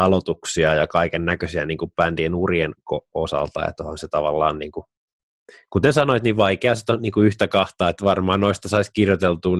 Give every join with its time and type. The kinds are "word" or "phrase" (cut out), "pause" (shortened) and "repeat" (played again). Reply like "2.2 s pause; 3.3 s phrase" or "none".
none